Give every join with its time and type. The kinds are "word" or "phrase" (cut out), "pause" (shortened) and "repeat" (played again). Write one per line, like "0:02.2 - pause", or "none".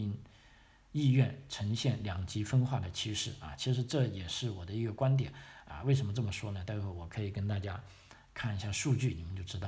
none